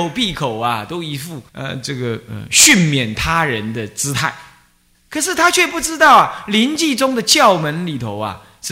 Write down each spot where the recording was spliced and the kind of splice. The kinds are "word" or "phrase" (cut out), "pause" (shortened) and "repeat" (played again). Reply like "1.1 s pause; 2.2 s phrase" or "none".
1.5 s pause; 4.9 s pause